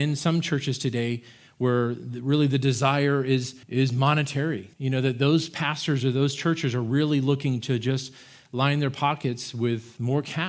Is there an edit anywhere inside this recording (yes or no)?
yes